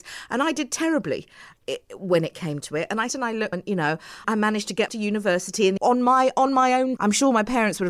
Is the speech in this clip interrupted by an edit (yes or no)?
yes